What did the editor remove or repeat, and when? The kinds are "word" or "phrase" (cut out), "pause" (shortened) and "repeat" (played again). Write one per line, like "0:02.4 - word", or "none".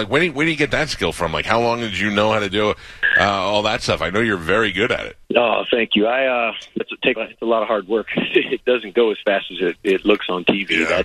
0:05.2 - pause
0:06.8 - word
0:07.2 - phrase

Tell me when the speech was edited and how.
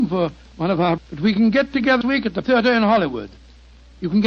0:01.0 - word
0:02.0 - word
0:02.4 - word

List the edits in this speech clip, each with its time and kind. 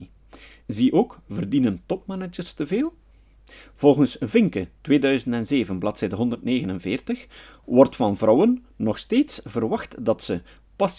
none

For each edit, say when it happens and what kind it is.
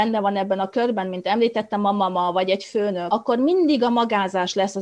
none

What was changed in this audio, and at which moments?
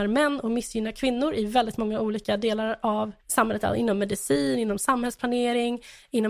0:03.2 - pause

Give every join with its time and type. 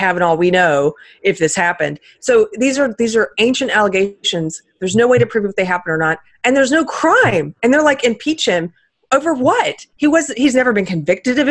none

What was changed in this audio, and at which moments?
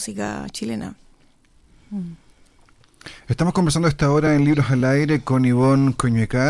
none

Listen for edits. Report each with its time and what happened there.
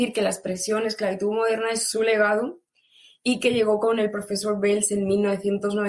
none

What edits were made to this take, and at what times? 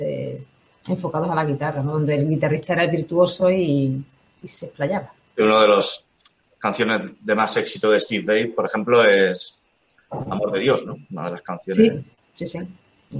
none

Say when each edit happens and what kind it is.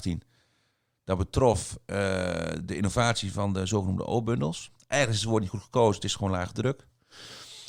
none

